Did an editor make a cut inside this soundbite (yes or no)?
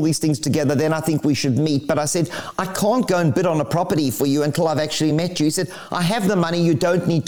no